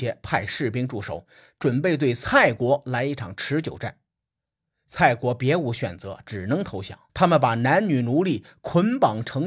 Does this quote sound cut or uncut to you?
cut